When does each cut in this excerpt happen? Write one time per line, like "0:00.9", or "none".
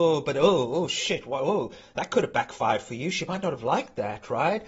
none